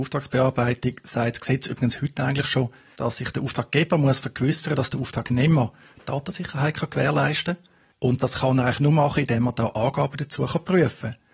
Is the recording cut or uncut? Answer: uncut